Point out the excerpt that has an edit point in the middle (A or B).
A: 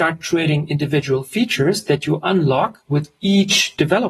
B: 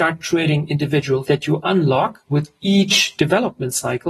B